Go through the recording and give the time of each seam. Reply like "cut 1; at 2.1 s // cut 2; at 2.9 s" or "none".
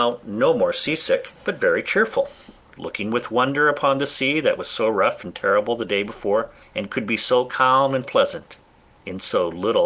cut 1; at 1.4 s // cut 2; at 6.6 s // cut 3; at 8.0 s